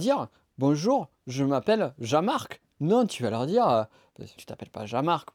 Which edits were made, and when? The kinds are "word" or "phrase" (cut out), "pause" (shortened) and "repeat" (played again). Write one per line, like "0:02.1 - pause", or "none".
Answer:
0:04.4 - word